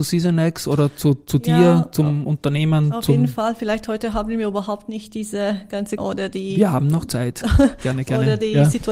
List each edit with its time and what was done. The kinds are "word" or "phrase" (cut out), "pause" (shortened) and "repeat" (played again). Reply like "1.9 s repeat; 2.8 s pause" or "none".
6.0 s phrase